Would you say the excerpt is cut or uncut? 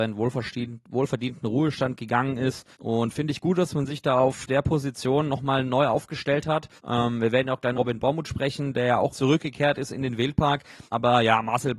cut